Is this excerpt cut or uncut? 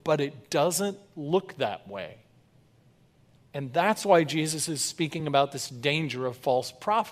uncut